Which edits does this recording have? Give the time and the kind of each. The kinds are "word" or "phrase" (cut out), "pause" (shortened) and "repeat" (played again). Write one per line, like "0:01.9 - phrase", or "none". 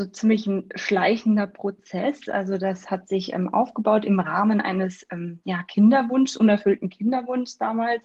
none